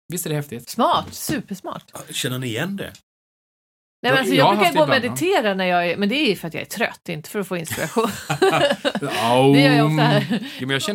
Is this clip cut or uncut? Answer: uncut